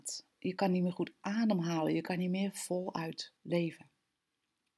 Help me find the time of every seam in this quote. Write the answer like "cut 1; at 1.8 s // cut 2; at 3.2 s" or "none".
cut 1; at 3.4 s